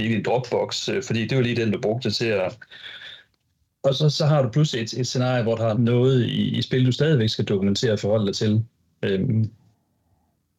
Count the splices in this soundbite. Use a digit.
1